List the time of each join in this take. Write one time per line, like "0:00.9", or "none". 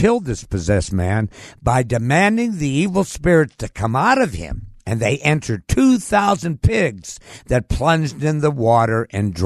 0:04.8